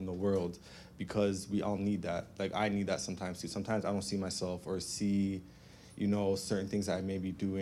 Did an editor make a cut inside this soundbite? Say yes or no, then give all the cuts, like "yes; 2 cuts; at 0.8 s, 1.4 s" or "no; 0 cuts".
no; 0 cuts